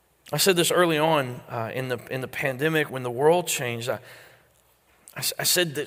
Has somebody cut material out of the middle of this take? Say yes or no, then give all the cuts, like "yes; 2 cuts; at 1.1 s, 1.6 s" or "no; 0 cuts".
yes; 1 cut; at 2.9 s